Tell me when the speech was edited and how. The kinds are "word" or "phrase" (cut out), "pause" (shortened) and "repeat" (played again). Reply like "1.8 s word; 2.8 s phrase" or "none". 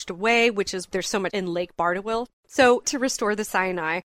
0.9 s word; 1.3 s word; 2.8 s phrase